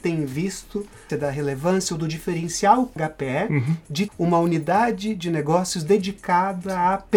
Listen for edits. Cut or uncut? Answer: cut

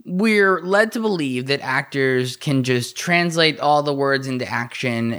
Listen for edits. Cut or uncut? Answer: uncut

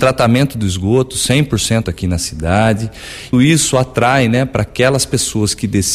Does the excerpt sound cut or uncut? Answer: cut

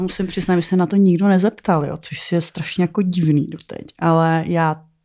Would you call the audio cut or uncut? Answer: uncut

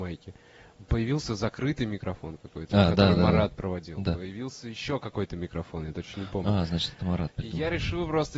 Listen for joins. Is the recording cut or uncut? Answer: uncut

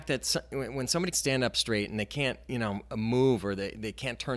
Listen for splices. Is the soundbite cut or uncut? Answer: cut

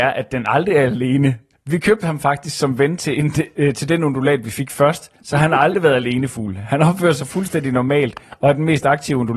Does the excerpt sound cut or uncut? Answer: cut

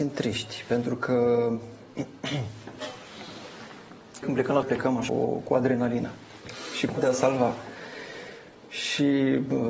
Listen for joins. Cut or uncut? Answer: cut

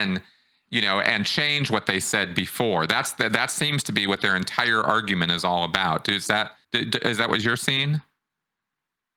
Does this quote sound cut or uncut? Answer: cut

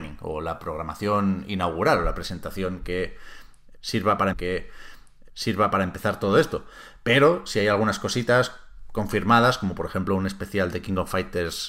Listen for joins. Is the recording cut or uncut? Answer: cut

